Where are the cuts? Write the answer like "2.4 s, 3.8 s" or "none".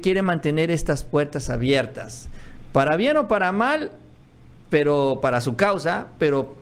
none